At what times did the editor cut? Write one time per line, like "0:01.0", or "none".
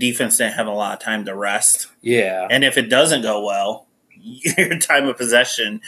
none